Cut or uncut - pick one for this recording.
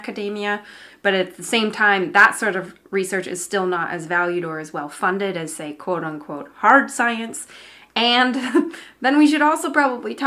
uncut